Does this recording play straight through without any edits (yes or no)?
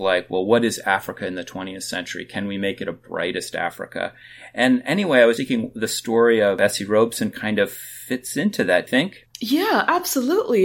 no